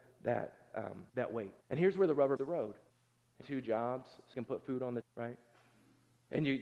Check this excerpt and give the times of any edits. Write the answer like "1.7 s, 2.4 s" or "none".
1.1 s, 1.6 s, 2.4 s, 2.9 s, 3.4 s, 4.3 s, 5.0 s